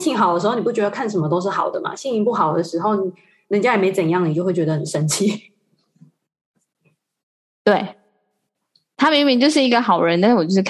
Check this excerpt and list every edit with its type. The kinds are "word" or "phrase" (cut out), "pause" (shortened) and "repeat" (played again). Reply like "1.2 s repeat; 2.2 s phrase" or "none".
none